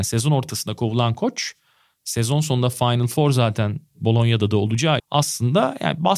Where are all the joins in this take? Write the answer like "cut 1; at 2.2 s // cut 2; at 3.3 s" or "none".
cut 1; at 5.0 s